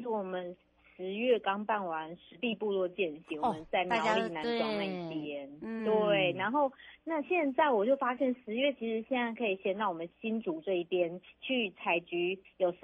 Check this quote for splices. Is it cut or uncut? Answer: uncut